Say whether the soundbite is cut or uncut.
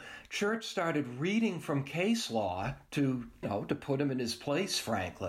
cut